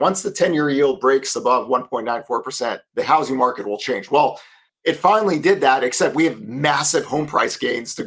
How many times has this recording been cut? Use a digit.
2